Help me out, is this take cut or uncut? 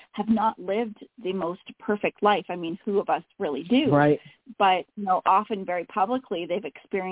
cut